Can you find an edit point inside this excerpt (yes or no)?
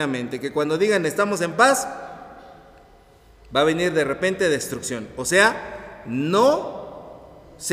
no